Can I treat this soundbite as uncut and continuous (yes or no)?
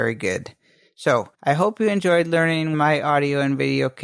no